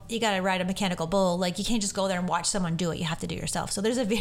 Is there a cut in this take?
no; 0 cuts

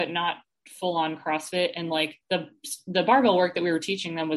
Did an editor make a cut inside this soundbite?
yes; 1 cut; at 2.2 s

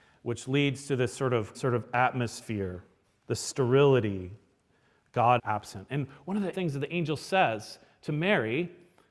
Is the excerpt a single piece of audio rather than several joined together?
no; 4 cuts; at 1.5 s, 3.0 s, 5.4 s, 6.5 s

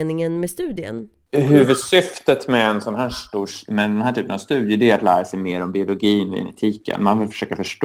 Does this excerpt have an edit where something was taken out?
no; 0 cuts

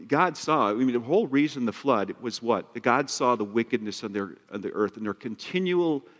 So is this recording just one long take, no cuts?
yes; 0 cuts

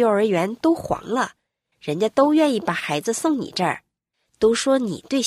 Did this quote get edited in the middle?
no; 0 cuts

